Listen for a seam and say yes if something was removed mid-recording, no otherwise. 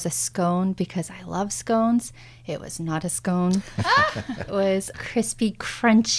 yes